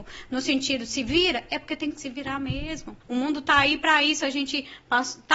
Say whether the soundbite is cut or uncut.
cut